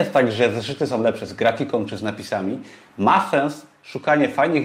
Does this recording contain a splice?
no; 0 cuts

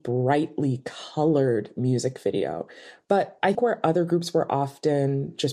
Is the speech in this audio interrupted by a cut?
yes; 1 cut; at 3.5 s

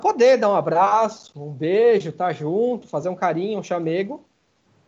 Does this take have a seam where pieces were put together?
no; 0 cuts

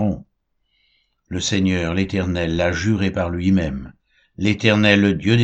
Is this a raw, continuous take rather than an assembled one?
yes; 0 cuts

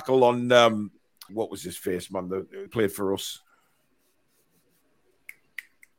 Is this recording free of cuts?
no; 2 cuts; at 1.3 s, 2.7 s

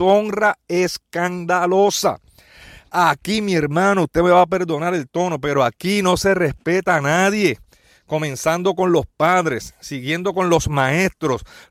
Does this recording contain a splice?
no; 0 cuts

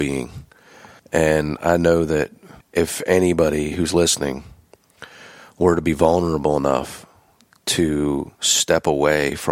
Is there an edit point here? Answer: yes; 3 cuts; at 1.0 s, 2.6 s, 8.3 s

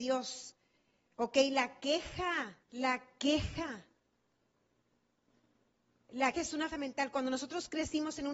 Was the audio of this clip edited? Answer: yes; 3 cuts; at 2.6 s, 6.3 s, 6.7 s

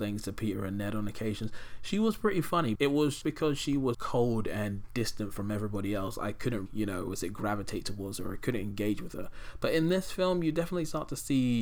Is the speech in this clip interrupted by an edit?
yes; 4 cuts; at 2.8 s, 3.2 s, 3.9 s, 6.7 s

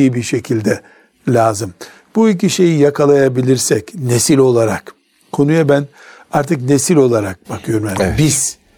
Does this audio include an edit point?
no; 0 cuts

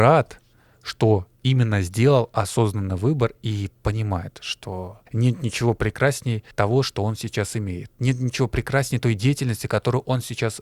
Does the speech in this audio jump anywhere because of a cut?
yes; 2 cuts; at 5.1 s, 6.5 s

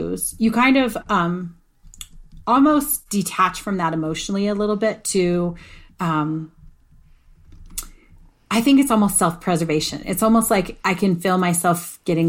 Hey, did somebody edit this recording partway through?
no; 0 cuts

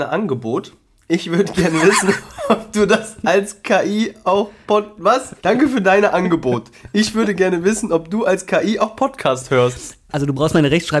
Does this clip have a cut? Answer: yes; 1 cut; at 5.4 s

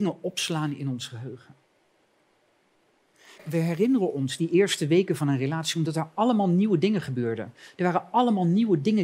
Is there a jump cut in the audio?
no; 0 cuts

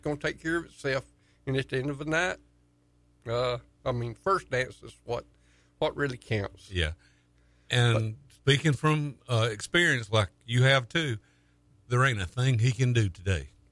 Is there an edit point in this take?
yes; 1 cut; at 3.8 s

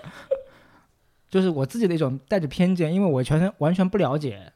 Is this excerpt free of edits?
yes; 0 cuts

